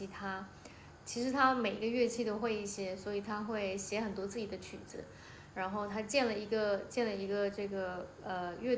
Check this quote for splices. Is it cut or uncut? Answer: uncut